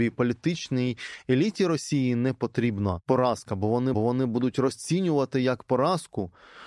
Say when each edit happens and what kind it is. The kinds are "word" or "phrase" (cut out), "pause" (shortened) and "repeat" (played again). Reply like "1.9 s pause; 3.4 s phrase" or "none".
3.9 s repeat